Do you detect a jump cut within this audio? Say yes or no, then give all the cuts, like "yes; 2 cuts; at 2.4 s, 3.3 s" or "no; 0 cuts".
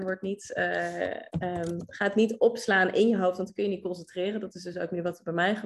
no; 0 cuts